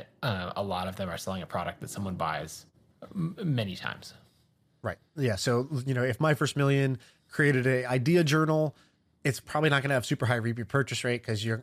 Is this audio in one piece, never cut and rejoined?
yes; 0 cuts

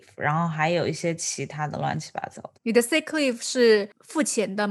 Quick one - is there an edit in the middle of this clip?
yes; 1 cut; at 2.6 s

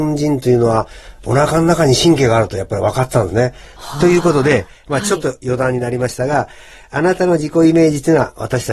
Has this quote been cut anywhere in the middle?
no; 0 cuts

